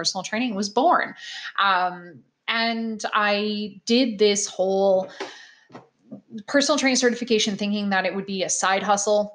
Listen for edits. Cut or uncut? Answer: uncut